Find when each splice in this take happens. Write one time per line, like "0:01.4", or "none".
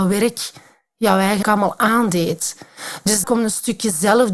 0:01.4
0:03.2